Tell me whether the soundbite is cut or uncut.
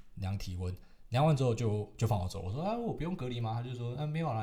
uncut